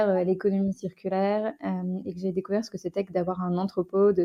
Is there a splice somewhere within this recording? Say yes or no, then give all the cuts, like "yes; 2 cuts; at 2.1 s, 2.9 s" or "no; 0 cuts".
no; 0 cuts